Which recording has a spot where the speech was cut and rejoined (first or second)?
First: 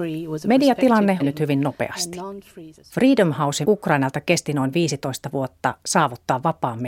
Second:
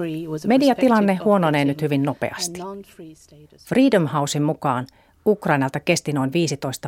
first